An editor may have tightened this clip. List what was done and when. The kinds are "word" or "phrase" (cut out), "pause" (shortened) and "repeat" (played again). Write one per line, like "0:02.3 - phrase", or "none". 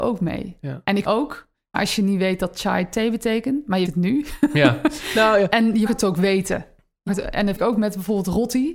0:01.0 - word
0:01.7 - word
0:03.9 - word
0:05.5 - word
0:05.9 - word
0:07.1 - word
0:07.6 - word